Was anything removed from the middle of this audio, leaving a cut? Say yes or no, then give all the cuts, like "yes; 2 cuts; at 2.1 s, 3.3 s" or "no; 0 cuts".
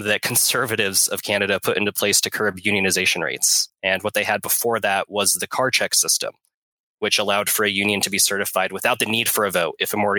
no; 0 cuts